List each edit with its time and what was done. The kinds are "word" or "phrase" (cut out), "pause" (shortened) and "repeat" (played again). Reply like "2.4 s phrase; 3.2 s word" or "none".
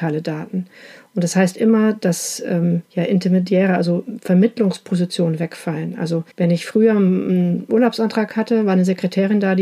2.8 s pause; 6.3 s pause